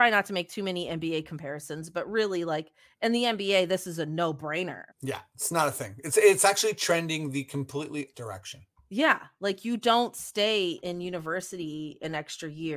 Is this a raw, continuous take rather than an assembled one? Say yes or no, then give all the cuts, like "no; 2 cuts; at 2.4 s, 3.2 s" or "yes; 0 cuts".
no; 3 cuts; at 4.9 s, 8.1 s, 10.8 s